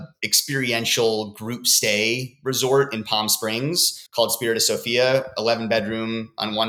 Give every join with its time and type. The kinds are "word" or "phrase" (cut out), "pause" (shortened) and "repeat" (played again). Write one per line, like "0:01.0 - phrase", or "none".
0:04.1 - pause